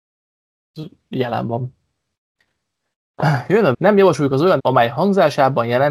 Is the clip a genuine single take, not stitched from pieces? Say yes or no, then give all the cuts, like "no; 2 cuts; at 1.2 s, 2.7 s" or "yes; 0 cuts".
no; 2 cuts; at 3.7 s, 4.6 s